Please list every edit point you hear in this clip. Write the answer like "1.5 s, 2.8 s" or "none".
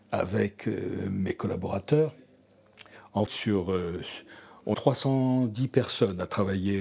3.3 s, 4.7 s